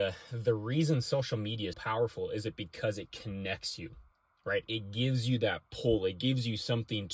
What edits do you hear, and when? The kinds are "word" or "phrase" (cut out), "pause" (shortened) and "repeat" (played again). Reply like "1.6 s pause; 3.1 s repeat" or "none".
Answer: 1.7 s word; 4.1 s pause